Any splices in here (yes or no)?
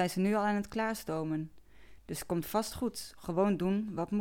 no